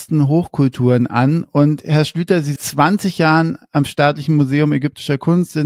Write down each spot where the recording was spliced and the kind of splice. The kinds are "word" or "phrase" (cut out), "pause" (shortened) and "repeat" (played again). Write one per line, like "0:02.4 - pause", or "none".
0:02.6 - phrase